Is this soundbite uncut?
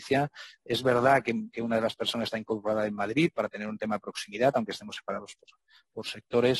yes; 0 cuts

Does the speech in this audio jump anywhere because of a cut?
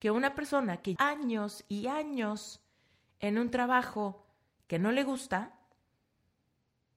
yes; 1 cut; at 1.0 s

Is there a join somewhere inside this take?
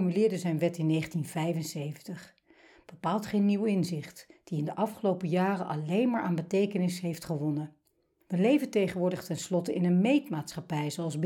no; 0 cuts

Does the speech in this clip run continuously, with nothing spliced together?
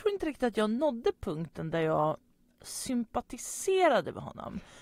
yes; 0 cuts

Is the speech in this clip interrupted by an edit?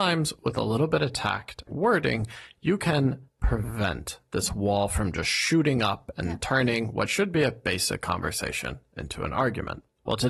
yes; 2 cuts; at 1.7 s, 3.3 s

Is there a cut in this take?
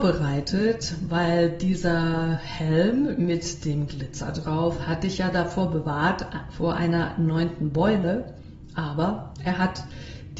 no; 0 cuts

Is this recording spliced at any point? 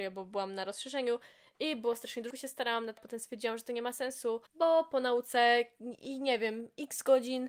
yes; 3 cuts; at 2.3 s, 3.0 s, 4.5 s

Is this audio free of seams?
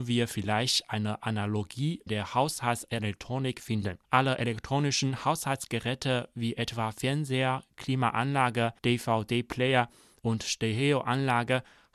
no; 3 cuts; at 2.1 s, 4.0 s, 8.8 s

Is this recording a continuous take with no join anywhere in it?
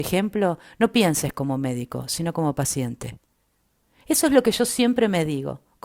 yes; 0 cuts

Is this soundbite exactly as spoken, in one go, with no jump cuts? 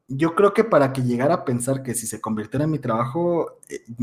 yes; 0 cuts

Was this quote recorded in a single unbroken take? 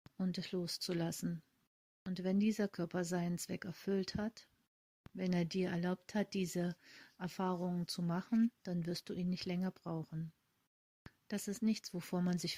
yes; 0 cuts

